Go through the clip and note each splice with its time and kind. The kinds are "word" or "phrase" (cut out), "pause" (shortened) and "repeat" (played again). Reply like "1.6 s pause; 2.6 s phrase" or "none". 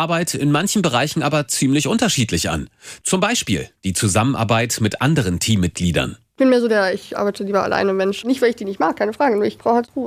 none